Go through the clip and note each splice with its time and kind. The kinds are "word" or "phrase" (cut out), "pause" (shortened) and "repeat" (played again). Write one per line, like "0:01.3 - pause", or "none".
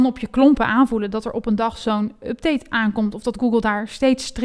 none